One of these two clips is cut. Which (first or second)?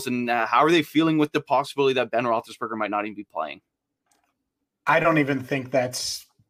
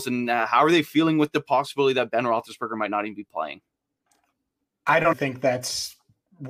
second